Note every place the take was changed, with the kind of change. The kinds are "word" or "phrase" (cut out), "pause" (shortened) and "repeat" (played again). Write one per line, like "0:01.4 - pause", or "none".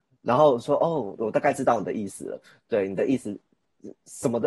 none